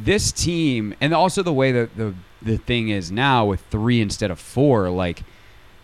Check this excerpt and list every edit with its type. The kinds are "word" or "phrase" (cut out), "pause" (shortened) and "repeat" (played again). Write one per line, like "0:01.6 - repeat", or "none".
none